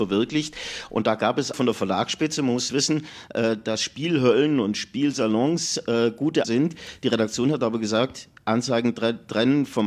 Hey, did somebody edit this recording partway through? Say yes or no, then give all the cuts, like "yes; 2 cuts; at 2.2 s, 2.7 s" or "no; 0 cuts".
yes; 3 cuts; at 1.5 s, 2.7 s, 6.4 s